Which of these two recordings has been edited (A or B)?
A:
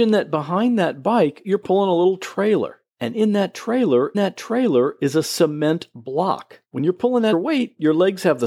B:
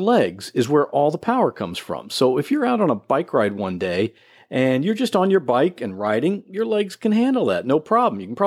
A